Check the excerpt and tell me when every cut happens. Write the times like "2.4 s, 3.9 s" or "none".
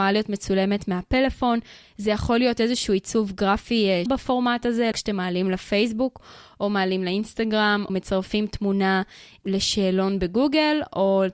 4.1 s, 4.9 s, 7.9 s